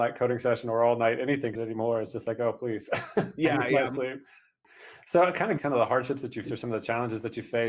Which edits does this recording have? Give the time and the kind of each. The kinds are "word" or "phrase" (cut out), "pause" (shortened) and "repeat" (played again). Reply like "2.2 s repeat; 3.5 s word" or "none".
1.6 s word; 5.6 s word; 6.4 s word